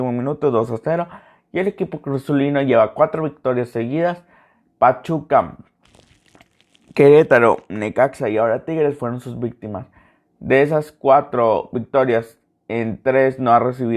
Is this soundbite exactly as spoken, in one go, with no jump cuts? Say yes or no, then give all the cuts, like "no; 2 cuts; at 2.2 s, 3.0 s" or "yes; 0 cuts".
yes; 0 cuts